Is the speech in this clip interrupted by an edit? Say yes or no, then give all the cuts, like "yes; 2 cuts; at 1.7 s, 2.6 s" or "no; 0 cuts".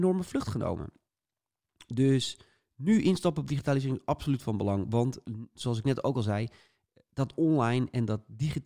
no; 0 cuts